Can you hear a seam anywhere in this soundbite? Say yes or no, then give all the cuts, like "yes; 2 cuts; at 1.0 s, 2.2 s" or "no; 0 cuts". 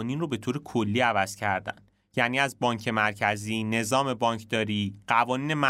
no; 0 cuts